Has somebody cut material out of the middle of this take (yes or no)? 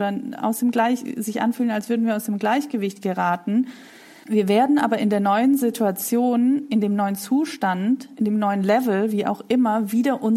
no